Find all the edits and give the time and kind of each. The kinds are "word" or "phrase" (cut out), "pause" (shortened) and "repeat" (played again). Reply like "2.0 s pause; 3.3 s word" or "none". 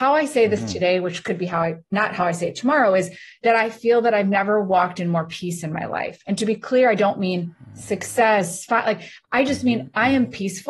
none